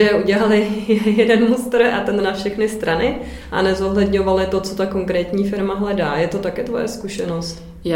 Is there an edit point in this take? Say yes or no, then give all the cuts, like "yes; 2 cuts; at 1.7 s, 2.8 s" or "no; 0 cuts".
yes; 1 cut; at 2.2 s